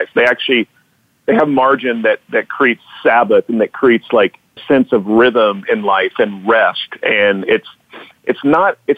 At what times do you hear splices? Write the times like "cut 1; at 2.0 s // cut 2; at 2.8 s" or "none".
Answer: cut 1; at 4.6 s